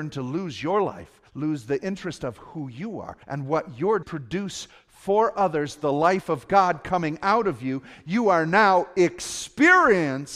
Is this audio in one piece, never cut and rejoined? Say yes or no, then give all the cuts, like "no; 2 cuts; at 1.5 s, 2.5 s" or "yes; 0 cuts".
no; 3 cuts; at 1.3 s, 3.2 s, 4.0 s